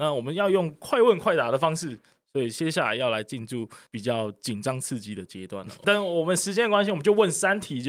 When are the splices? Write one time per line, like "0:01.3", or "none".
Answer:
0:03.9
0:05.8